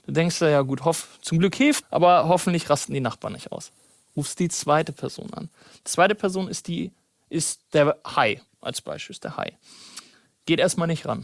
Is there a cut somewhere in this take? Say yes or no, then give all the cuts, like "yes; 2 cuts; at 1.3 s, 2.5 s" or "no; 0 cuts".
yes; 1 cut; at 1.8 s